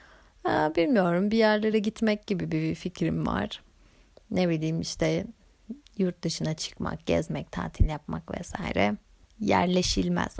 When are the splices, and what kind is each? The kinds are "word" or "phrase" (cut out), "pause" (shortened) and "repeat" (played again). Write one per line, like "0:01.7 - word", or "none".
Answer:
none